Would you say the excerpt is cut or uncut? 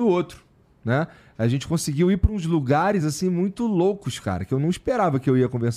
uncut